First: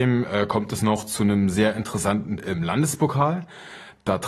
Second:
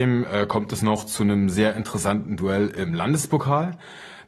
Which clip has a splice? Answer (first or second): first